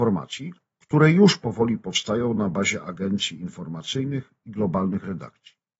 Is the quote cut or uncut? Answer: uncut